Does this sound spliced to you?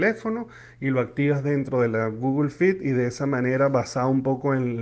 no; 0 cuts

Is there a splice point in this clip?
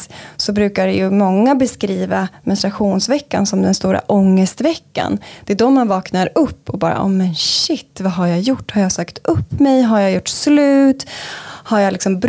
no; 0 cuts

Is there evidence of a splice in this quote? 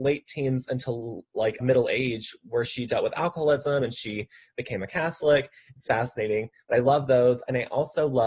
yes; 2 cuts; at 1.6 s, 5.9 s

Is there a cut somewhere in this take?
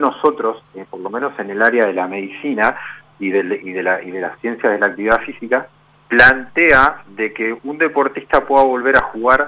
no; 0 cuts

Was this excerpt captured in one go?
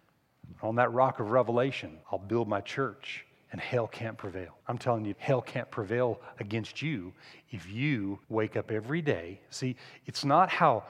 no; 4 cuts; at 2.0 s, 4.6 s, 5.1 s, 8.2 s

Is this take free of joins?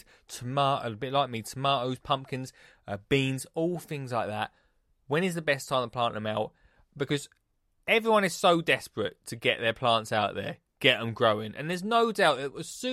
yes; 0 cuts

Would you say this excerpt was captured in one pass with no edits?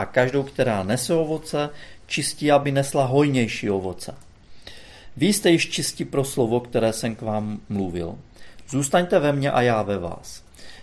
yes; 0 cuts

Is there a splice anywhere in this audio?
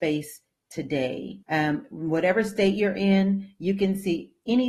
yes; 1 cut; at 1.4 s

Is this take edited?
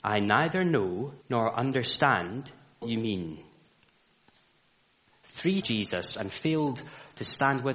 yes; 3 cuts; at 1.2 s, 2.8 s, 5.6 s

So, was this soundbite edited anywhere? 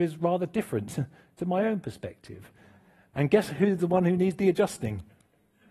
no; 0 cuts

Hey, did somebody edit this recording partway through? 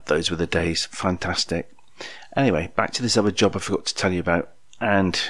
no; 0 cuts

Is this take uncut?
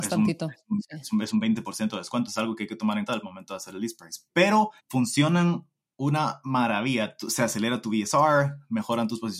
no; 3 cuts; at 2.3 s, 3.1 s, 4.8 s

